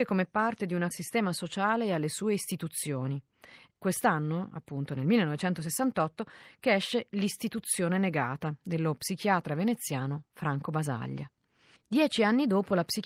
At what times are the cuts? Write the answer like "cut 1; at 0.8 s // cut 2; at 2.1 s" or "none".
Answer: cut 1; at 0.9 s // cut 2; at 3.8 s